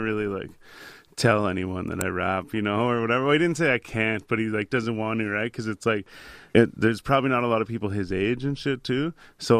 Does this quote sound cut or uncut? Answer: cut